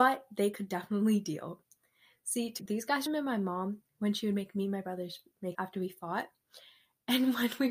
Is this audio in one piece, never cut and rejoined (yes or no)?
no